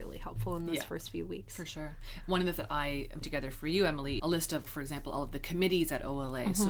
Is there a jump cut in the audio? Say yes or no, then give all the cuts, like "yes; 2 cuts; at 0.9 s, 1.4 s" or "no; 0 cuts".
yes; 4 cuts; at 2.6 s, 3.2 s, 4.2 s, 4.6 s